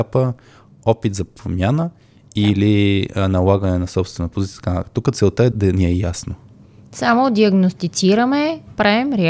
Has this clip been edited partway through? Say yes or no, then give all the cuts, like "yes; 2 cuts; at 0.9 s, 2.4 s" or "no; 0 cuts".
yes; 1 cut; at 5.5 s